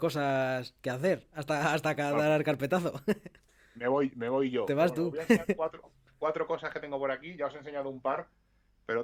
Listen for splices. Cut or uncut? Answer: uncut